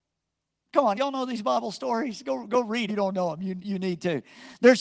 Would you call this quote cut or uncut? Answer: cut